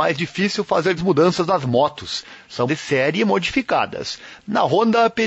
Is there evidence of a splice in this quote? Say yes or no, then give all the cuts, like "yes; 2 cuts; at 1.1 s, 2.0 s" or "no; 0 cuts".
yes; 2 cuts; at 1.0 s, 2.7 s